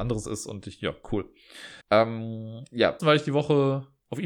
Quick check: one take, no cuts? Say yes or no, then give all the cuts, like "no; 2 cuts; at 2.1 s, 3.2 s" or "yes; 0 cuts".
no; 3 cuts; at 1.0 s, 1.8 s, 3.0 s